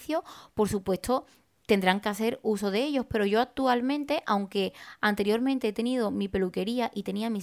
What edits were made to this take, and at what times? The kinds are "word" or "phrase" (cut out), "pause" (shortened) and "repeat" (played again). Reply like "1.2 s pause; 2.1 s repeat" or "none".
none